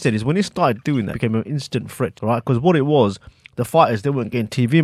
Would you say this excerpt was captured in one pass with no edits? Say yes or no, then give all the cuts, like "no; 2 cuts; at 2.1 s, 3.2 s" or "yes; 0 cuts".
no; 2 cuts; at 1.1 s, 2.2 s